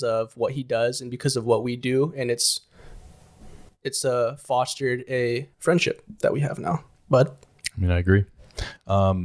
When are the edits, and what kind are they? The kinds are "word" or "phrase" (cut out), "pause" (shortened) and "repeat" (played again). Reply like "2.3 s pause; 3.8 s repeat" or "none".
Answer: 5.5 s pause